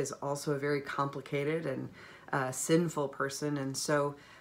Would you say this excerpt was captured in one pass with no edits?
yes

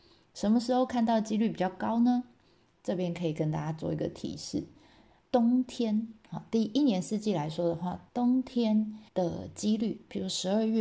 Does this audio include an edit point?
yes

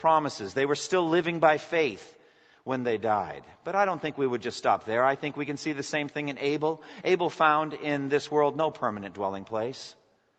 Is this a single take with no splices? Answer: yes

